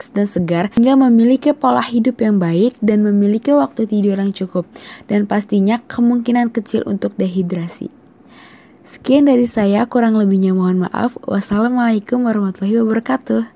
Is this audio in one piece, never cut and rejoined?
yes; 0 cuts

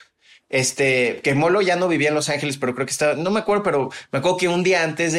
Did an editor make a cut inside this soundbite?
no; 0 cuts

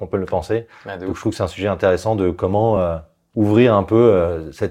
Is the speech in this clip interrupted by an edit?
no; 0 cuts

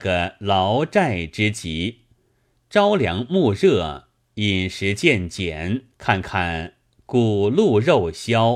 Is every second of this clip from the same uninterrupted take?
no; 1 cut; at 5.9 s

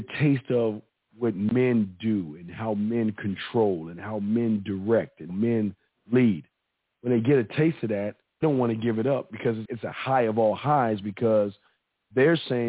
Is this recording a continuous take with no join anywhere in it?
no; 3 cuts; at 5.3 s, 8.4 s, 9.7 s

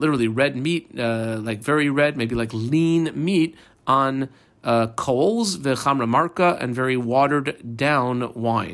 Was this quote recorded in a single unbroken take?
yes; 0 cuts

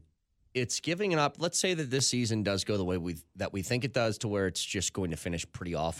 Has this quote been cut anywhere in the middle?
no; 0 cuts

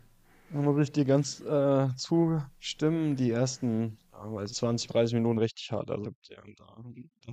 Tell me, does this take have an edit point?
yes; 5 cuts; at 4.0 s, 4.5 s, 4.9 s, 5.3 s, 6.0 s

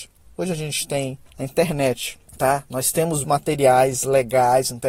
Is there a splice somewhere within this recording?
yes; 3 cuts; at 1.3 s, 2.3 s, 3.2 s

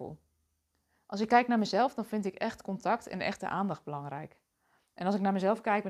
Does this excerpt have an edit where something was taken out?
no; 0 cuts

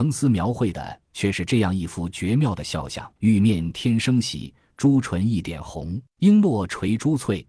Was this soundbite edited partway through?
yes; 2 cuts; at 3.2 s, 6.1 s

